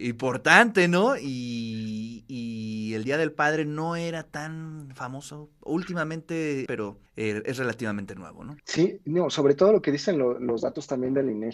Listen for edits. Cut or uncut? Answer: cut